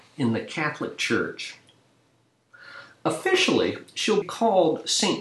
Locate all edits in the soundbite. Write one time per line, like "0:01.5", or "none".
0:04.2